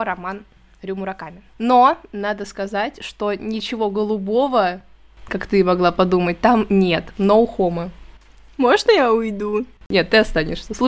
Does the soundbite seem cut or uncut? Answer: uncut